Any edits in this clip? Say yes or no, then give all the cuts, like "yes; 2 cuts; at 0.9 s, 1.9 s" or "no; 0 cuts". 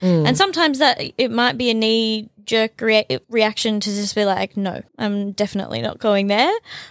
yes; 2 cuts; at 3.2 s, 4.9 s